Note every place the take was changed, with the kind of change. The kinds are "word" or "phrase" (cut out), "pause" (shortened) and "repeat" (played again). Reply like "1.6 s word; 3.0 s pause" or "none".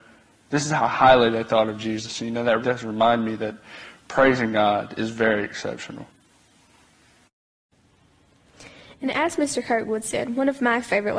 2.6 s word